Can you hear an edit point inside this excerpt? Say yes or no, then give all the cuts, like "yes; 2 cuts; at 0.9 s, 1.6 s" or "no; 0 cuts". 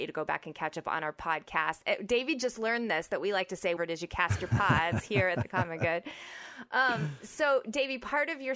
yes; 1 cut; at 3.8 s